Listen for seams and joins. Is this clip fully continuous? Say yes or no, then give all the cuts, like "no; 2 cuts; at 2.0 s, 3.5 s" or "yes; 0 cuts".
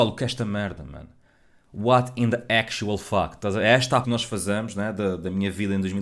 no; 1 cut; at 4.0 s